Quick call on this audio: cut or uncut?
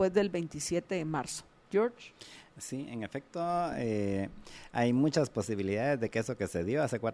uncut